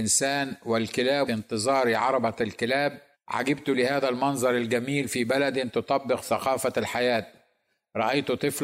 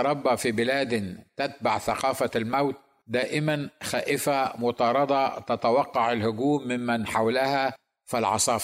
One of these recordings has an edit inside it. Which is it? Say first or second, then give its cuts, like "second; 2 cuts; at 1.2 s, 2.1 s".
first; 2 cuts; at 1.3 s, 3.1 s